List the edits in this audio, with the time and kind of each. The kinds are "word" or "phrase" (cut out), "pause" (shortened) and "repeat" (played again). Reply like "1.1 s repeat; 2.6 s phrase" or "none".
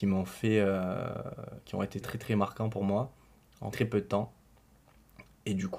2.0 s word; 3.7 s word